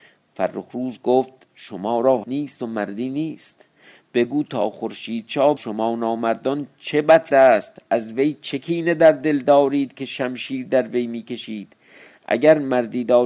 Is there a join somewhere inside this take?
yes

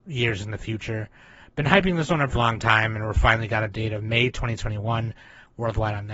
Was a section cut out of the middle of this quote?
yes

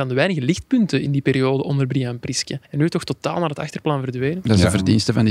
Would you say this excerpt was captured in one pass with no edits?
no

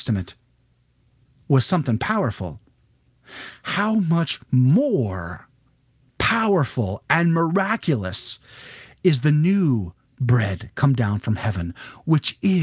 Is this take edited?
no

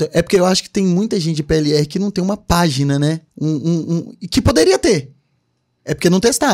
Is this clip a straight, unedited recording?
no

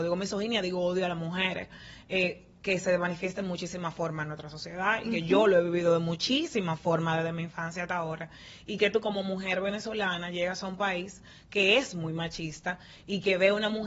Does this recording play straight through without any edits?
yes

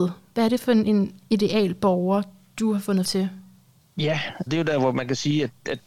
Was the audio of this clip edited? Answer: yes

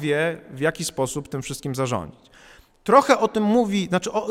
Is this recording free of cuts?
yes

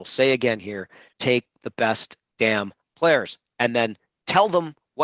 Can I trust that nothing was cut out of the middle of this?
no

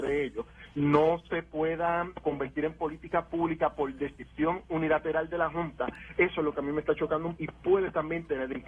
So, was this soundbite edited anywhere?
yes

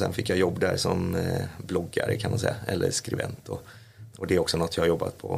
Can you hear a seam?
yes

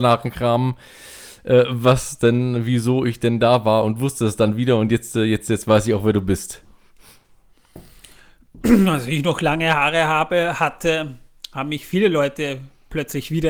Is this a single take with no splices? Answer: yes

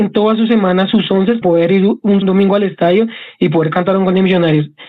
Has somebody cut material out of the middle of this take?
yes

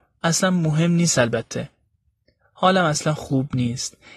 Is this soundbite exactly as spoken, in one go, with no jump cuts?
yes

